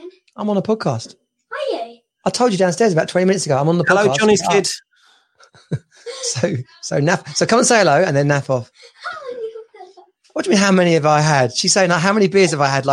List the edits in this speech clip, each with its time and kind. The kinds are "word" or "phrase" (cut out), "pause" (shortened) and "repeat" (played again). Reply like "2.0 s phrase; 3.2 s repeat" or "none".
none